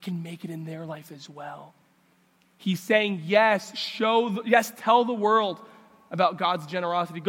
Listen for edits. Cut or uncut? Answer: uncut